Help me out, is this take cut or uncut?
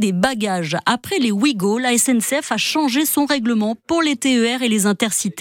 uncut